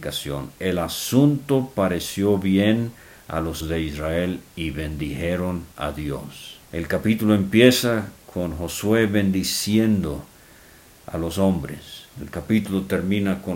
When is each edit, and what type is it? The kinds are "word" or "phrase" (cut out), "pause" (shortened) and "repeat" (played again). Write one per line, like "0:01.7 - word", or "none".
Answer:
0:03.6 - word
0:06.6 - pause